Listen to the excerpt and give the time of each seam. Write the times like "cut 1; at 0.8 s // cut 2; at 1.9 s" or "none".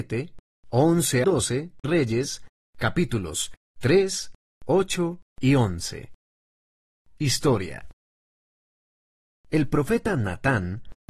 cut 1; at 1.2 s // cut 2; at 1.8 s